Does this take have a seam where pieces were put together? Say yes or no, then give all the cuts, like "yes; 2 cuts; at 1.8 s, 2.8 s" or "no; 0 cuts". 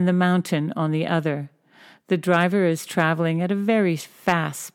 no; 0 cuts